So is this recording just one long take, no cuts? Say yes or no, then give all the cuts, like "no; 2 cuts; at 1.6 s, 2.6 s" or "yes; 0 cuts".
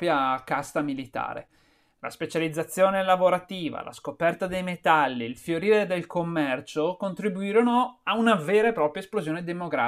yes; 0 cuts